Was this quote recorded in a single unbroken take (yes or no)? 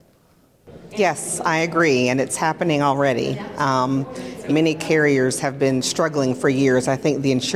no